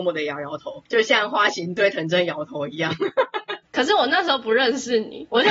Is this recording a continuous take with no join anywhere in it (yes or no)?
yes